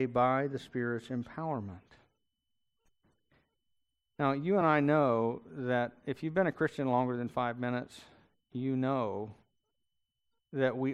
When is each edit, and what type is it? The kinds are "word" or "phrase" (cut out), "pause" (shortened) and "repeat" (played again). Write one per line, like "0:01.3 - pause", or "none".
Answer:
none